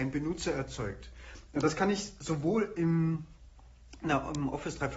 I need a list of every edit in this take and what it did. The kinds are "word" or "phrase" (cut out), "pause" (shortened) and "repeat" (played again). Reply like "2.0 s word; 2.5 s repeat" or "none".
none